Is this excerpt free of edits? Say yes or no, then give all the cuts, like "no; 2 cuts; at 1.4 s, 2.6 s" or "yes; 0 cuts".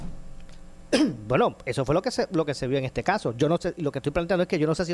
yes; 0 cuts